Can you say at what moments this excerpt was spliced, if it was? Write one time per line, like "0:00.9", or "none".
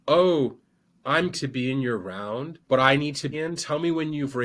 0:01.3
0:02.6
0:03.3